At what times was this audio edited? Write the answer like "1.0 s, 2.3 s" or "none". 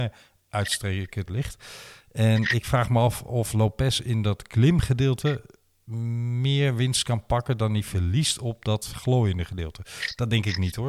1.3 s